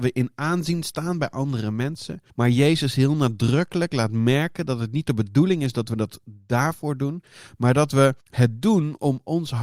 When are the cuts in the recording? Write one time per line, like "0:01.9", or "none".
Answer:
0:02.3
0:08.2

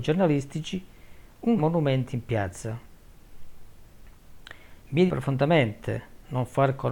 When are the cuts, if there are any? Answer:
0:01.6
0:05.1

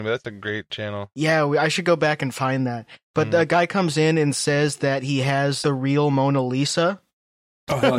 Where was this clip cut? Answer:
0:05.6

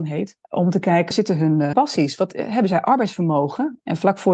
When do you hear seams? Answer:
0:01.1
0:01.7

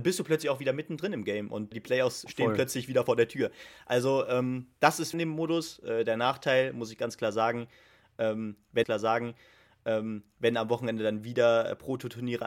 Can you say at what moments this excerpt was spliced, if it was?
0:01.7
0:02.3
0:04.8
0:05.1
0:08.8

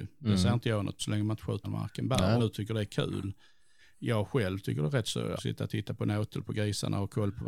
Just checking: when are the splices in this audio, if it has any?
0:01.0
0:01.6
0:02.4
0:05.4

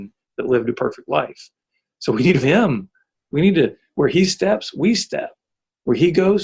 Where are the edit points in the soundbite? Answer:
0:02.4

